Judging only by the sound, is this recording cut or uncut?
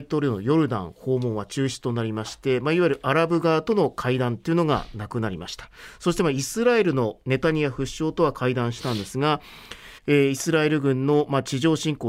cut